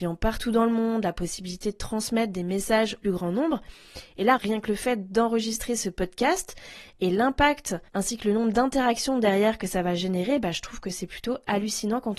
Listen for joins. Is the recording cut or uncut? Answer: cut